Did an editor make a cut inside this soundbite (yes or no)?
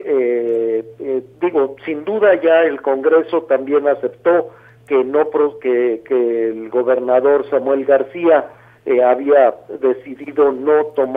no